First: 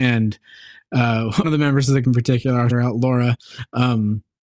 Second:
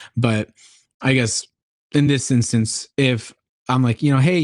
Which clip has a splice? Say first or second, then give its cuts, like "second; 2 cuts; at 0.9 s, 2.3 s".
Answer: first; 3 cuts; at 1.4 s, 2.0 s, 2.7 s